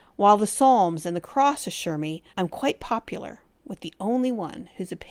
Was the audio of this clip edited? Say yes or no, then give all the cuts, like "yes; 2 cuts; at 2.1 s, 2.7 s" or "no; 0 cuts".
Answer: yes; 1 cut; at 2.3 s